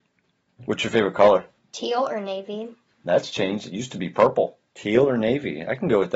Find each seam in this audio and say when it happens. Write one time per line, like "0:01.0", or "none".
0:01.6
0:04.7